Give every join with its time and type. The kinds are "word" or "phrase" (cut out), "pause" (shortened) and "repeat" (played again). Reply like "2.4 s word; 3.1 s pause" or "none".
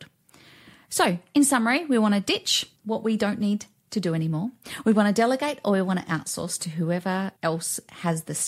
2.8 s pause; 7.4 s pause